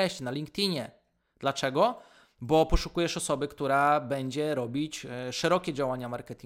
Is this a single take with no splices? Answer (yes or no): yes